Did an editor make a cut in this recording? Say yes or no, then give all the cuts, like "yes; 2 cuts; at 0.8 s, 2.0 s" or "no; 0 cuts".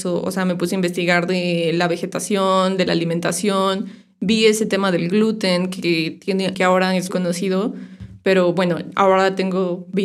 yes; 2 cuts; at 6.5 s, 7.1 s